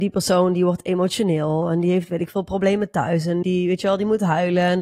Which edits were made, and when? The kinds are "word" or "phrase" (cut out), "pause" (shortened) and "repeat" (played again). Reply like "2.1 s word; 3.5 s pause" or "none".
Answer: 3.4 s word